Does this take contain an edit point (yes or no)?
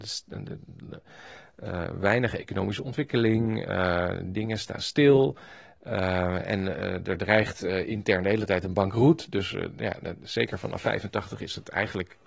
no